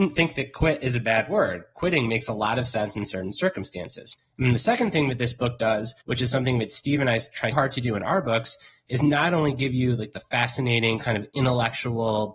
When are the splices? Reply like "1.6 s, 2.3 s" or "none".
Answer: 4.2 s, 6.0 s, 7.5 s